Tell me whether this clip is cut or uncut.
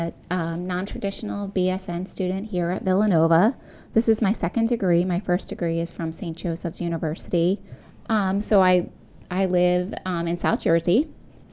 uncut